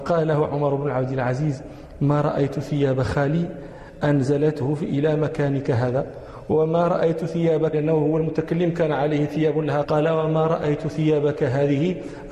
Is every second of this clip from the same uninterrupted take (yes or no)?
no